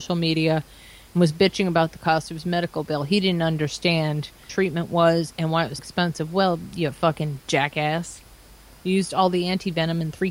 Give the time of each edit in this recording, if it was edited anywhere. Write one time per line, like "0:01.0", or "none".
0:04.5
0:05.8